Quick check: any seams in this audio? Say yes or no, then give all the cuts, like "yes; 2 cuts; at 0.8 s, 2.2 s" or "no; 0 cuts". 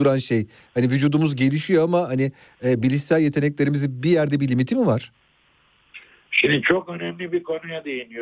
no; 0 cuts